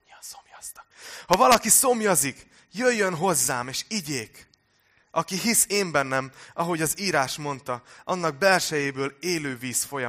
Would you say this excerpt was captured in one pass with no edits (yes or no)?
yes